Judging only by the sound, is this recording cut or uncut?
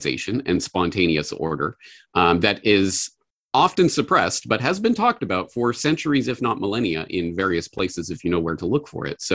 uncut